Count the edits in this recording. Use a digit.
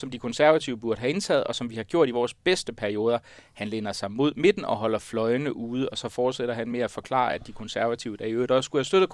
0